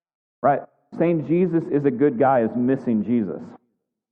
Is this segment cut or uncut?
uncut